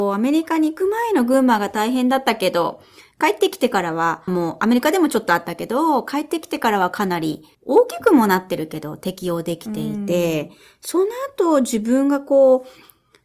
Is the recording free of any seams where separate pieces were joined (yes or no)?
no